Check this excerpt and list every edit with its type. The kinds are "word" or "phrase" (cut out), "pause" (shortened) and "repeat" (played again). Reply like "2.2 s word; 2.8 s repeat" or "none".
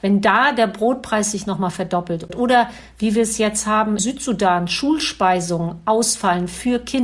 4.0 s word